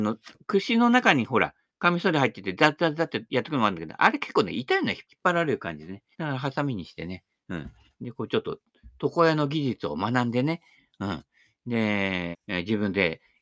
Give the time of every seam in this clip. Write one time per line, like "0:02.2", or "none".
0:05.1
0:06.1
0:12.3